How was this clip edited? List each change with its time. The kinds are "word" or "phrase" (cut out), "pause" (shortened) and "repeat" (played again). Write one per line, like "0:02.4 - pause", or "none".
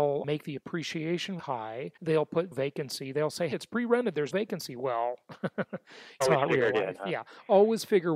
0:01.4 - phrase
0:02.0 - pause
0:02.5 - word
0:03.5 - word
0:04.3 - word
0:06.2 - phrase